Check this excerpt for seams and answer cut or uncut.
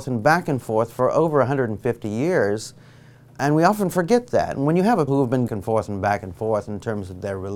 cut